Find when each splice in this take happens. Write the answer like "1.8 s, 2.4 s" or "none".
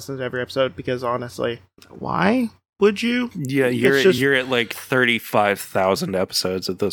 none